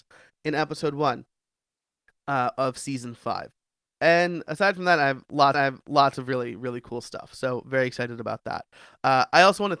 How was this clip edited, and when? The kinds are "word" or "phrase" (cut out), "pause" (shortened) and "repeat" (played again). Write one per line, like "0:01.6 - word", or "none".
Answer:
0:05.5 - repeat